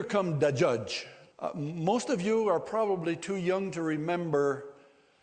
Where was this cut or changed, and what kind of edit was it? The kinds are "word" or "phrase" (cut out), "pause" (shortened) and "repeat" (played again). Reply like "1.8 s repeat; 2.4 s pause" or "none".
1.3 s pause